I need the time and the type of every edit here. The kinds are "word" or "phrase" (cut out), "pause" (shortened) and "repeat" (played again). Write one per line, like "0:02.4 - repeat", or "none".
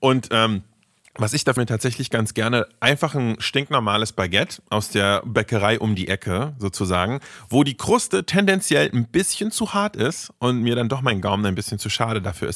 0:01.6 - phrase